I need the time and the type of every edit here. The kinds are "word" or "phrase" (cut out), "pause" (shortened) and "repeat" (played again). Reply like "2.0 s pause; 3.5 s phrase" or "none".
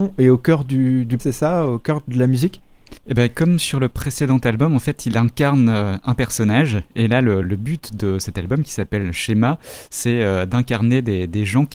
1.2 s word; 3.0 s pause; 7.4 s word